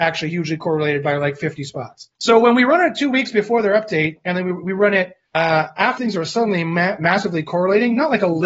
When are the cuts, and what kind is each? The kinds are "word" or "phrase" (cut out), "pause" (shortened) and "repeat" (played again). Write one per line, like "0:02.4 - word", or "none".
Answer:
0:02.2 - pause
0:05.3 - pause
0:06.0 - phrase